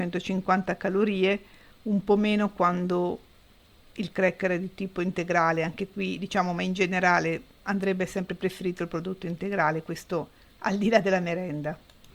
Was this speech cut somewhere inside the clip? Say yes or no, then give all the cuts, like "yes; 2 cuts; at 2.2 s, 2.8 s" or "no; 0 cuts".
no; 0 cuts